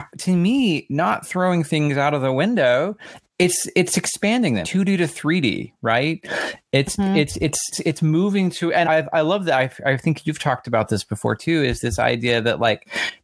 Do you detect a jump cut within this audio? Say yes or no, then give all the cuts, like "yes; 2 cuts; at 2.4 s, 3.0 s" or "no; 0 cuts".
yes; 4 cuts; at 3.2 s, 4.6 s, 7.7 s, 8.8 s